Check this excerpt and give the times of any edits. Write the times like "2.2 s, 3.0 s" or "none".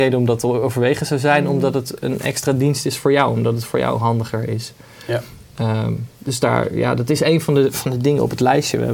none